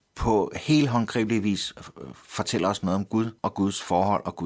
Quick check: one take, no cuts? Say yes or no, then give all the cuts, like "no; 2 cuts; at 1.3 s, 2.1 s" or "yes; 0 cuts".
no; 1 cut; at 3.4 s